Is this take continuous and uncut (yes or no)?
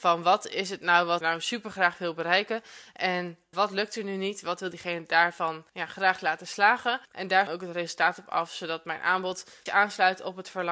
no